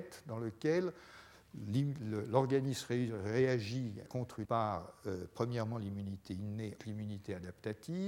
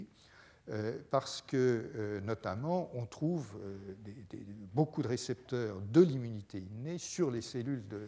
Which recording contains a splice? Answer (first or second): first